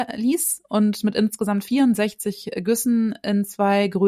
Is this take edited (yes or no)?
no